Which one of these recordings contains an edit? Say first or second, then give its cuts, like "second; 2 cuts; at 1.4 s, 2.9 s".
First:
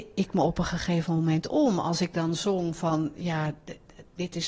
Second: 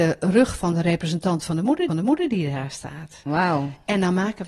second; 1 cut; at 1.9 s